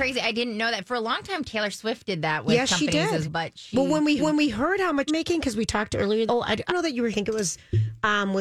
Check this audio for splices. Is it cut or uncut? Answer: cut